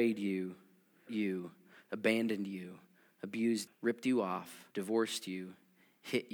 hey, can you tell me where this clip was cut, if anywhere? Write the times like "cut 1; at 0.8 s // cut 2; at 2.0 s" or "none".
cut 1; at 1.1 s // cut 2; at 3.7 s // cut 3; at 4.7 s